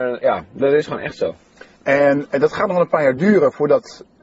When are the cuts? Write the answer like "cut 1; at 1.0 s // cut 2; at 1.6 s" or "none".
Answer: none